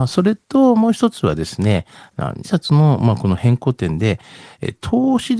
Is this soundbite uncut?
no; 1 cut; at 2.4 s

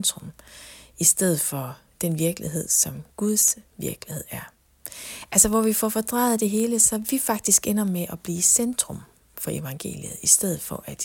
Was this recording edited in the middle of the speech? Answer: no; 0 cuts

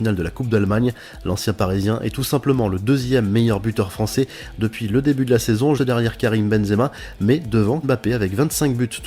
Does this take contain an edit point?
yes; 2 cuts; at 5.8 s, 7.8 s

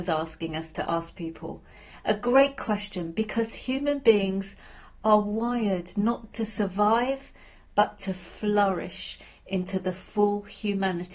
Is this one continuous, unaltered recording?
no; 1 cut; at 6.3 s

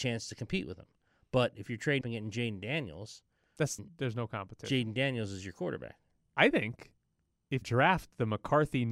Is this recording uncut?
no; 3 cuts; at 2.0 s, 3.8 s, 7.6 s

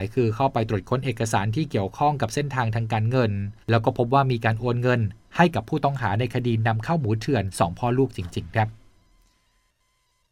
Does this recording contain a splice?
yes; 1 cut; at 3.6 s

